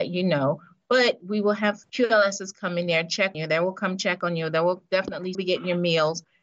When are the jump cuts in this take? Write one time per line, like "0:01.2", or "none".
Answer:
0:03.3
0:05.3